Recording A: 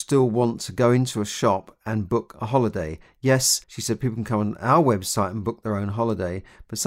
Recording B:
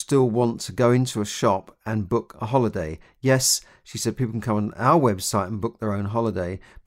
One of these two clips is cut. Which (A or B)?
A